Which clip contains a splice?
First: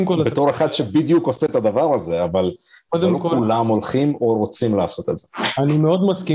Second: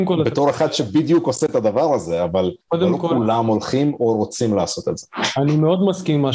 second; 1 cut; at 2.6 s

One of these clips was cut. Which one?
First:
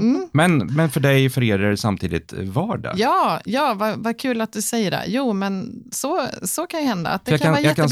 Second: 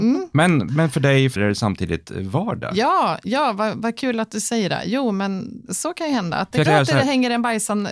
second; 3 cuts; at 1.4 s, 5.7 s, 6.7 s

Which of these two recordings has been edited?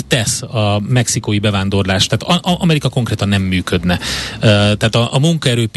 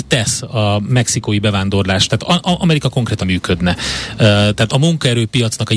second; 2 cuts; at 3.2 s, 4.7 s

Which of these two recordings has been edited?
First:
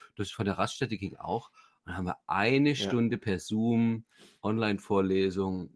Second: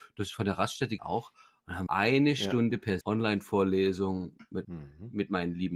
second; 4 cuts; at 1.0 s, 1.9 s, 3.0 s, 4.6 s

